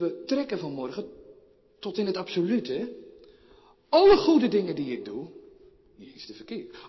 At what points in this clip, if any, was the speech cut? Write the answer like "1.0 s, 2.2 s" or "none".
none